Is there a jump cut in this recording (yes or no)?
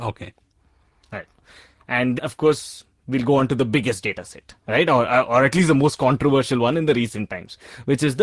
yes